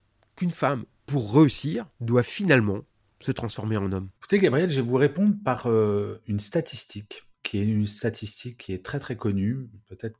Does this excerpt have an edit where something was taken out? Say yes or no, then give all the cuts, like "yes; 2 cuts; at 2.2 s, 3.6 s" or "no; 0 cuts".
yes; 3 cuts; at 1.9 s, 2.9 s, 4.2 s